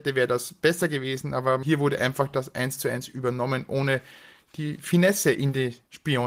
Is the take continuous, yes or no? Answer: yes